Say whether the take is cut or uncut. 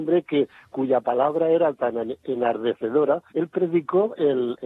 cut